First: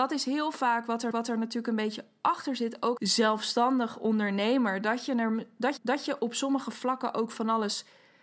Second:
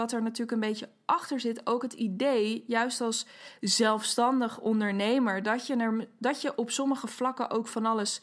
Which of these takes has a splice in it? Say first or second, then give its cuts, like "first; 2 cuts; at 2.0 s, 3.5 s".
first; 3 cuts; at 1.1 s, 3.0 s, 5.8 s